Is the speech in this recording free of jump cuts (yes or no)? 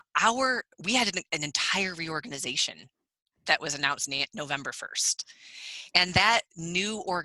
yes